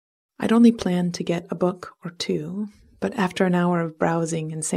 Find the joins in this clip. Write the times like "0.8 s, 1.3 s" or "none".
none